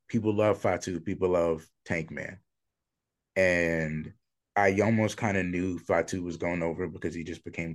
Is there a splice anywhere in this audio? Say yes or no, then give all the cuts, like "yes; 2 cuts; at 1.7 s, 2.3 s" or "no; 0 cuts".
yes; 1 cut; at 4.4 s